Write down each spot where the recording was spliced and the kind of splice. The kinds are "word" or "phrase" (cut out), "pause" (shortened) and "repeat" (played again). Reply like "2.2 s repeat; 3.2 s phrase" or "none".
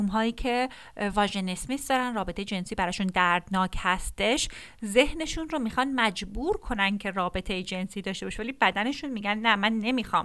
none